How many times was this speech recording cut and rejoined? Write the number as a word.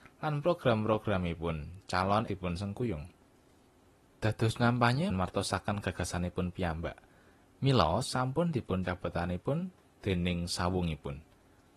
five